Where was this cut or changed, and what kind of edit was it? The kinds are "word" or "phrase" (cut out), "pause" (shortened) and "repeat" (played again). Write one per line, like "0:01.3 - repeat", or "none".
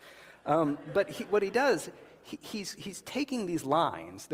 none